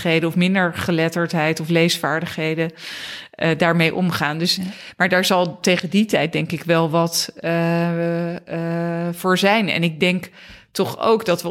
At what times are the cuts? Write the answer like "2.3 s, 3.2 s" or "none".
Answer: none